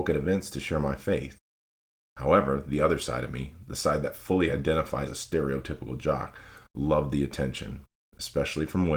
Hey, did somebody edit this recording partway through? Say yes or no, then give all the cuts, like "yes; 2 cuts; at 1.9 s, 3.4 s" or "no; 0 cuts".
yes; 1 cut; at 5.1 s